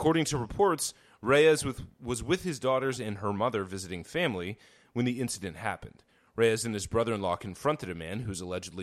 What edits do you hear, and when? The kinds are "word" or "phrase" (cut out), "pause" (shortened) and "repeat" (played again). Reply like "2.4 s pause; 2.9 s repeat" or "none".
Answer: none